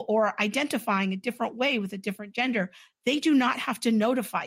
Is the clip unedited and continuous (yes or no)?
yes